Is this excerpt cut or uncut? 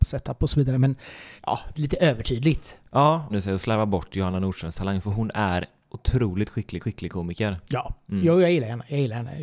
cut